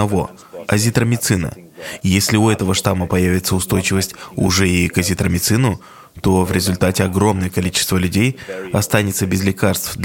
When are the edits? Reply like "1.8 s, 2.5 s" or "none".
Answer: none